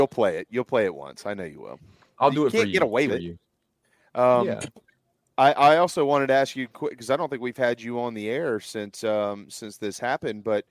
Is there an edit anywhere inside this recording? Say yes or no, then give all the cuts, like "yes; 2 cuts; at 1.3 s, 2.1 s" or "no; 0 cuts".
yes; 1 cut; at 3.1 s